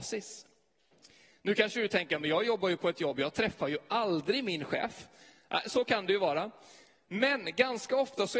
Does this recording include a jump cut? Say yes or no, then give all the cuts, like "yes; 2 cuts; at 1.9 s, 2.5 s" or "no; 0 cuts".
no; 0 cuts